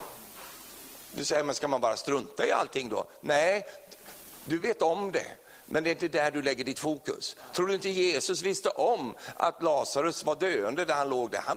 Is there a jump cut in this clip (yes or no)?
no